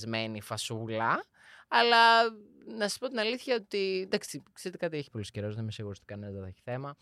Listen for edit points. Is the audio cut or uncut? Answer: cut